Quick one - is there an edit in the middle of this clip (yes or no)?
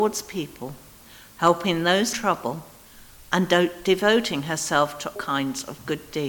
yes